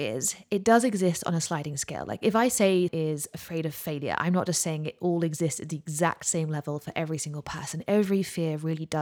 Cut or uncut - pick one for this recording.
cut